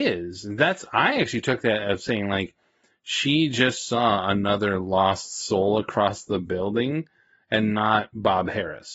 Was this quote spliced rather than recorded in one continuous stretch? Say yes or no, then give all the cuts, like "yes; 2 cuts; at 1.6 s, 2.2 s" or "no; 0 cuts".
no; 0 cuts